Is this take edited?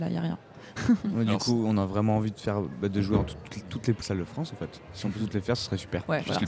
yes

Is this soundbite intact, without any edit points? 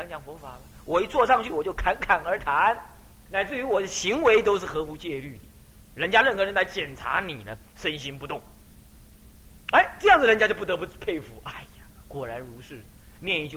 no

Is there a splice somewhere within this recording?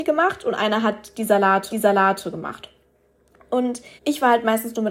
yes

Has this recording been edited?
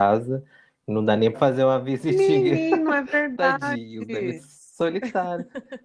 yes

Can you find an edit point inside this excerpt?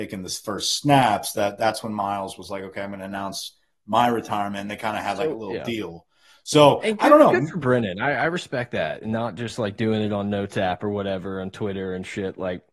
no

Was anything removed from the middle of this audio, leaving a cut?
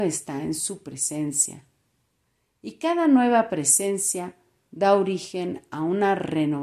no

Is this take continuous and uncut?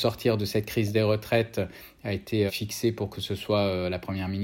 no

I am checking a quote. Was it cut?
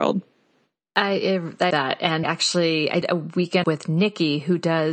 yes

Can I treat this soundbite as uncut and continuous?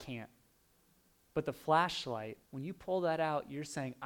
no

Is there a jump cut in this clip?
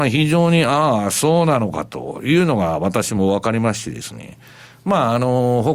no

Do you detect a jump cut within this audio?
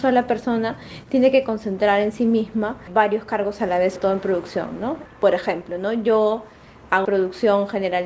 yes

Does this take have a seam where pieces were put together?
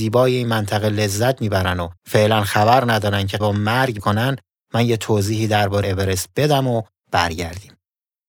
yes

